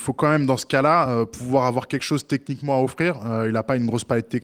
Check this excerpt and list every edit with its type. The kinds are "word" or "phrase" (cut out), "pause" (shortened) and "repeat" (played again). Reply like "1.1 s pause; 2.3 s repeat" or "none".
none